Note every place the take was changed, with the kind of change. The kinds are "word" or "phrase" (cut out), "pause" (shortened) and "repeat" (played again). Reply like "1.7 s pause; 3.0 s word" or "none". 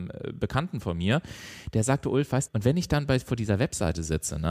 2.5 s word